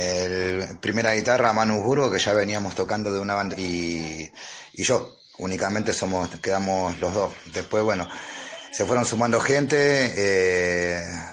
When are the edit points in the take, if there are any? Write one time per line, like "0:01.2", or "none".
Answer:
0:03.5
0:05.3